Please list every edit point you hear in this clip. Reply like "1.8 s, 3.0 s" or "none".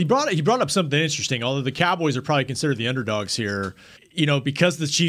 4.0 s

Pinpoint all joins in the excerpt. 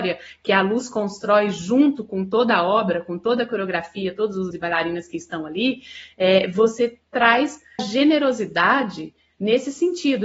4.5 s, 7.8 s

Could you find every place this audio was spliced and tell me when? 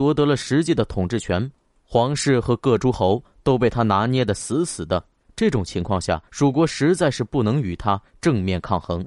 6.3 s

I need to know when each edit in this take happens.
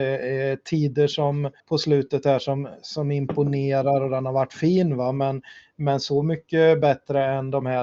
1.6 s

